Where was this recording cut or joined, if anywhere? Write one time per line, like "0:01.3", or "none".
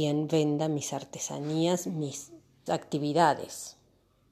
0:02.7